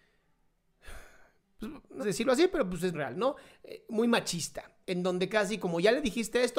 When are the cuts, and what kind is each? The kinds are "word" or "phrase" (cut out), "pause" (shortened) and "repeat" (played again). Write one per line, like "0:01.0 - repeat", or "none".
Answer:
0:02.0 - phrase
0:02.9 - word
0:04.8 - pause
0:05.3 - word